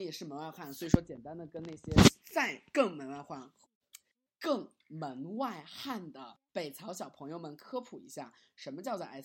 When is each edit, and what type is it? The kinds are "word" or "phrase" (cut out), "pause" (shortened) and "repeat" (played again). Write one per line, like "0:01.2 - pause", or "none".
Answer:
0:02.2 - pause
0:06.5 - pause